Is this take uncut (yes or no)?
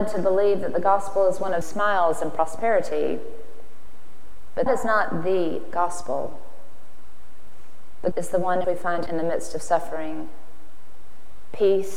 no